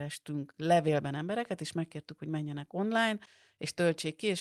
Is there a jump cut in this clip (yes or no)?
no